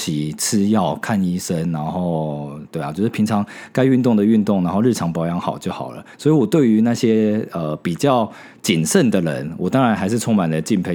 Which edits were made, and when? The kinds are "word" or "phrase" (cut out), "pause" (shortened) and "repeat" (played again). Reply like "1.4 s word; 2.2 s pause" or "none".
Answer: 6.1 s pause